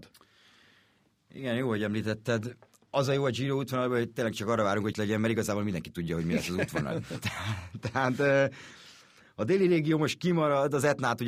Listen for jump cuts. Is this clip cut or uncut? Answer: cut